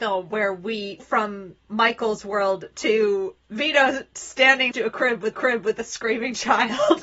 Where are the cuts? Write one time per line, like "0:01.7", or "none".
0:01.0
0:01.6
0:03.4
0:04.7
0:05.3